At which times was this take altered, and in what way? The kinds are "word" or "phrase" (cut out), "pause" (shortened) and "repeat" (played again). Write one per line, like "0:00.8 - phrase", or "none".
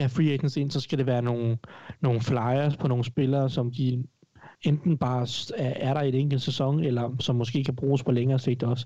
0:04.5 - pause